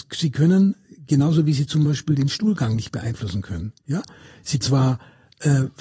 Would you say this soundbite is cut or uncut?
cut